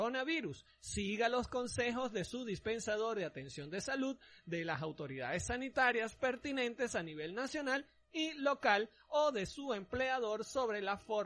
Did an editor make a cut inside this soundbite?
no; 0 cuts

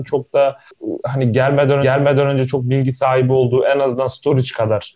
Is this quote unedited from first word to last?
no; 1 cut; at 1.8 s

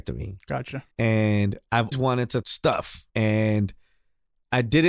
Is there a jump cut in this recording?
yes; 4 cuts; at 0.9 s, 1.9 s, 2.4 s, 3.1 s

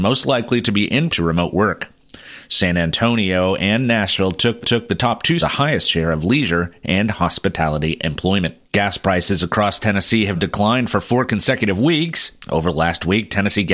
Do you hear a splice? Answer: yes; 5 cuts; at 1.1 s, 4.6 s, 5.4 s, 8.6 s, 10.3 s

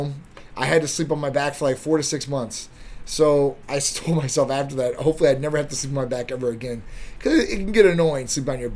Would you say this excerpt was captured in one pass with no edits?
yes; 0 cuts

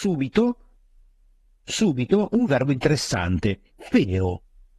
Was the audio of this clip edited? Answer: yes; 1 cut; at 3.7 s

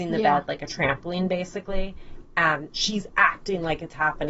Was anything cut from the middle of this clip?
yes; 1 cut; at 2.7 s

